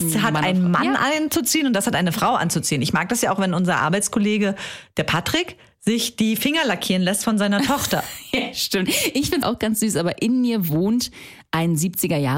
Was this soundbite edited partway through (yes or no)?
yes